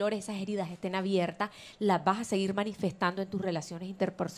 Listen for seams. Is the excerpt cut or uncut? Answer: uncut